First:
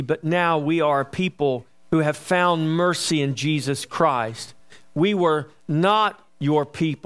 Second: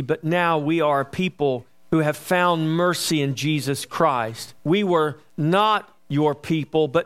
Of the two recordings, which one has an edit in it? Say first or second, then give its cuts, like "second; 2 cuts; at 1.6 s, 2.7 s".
second; 1 cut; at 4.6 s